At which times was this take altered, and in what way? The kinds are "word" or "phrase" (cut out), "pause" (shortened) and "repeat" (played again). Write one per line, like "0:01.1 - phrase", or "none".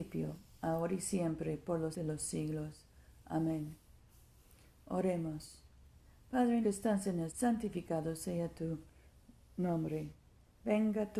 0:01.9 - word
0:06.6 - word
0:07.3 - word